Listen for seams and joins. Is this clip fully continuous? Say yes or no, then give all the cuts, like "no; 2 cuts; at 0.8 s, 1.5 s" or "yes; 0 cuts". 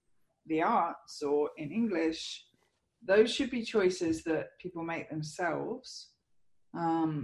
yes; 0 cuts